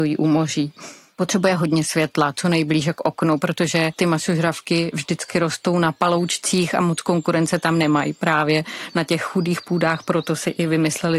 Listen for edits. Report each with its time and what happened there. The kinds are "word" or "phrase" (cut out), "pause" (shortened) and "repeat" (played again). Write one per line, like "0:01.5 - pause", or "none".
none